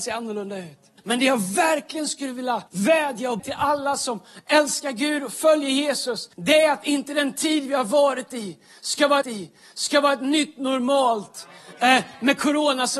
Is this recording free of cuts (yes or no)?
no